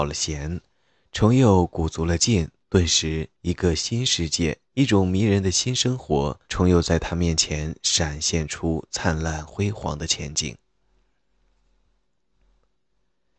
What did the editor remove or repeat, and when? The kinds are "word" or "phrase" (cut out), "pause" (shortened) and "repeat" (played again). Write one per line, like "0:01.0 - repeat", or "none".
0:02.6 - pause
0:03.3 - pause
0:04.7 - pause
0:06.4 - pause